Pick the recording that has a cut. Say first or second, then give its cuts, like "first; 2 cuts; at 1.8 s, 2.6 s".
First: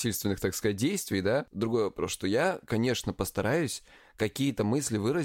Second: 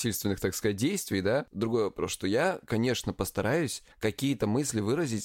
second; 1 cut; at 3.9 s